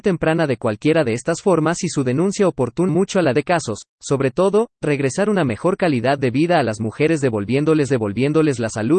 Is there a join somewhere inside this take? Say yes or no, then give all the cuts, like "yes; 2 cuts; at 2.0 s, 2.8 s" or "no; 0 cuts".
yes; 3 cuts; at 2.9 s, 3.3 s, 7.9 s